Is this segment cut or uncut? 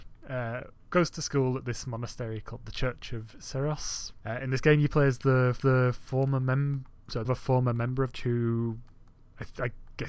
cut